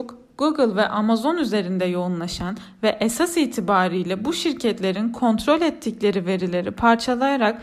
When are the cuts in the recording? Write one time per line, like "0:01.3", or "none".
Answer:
none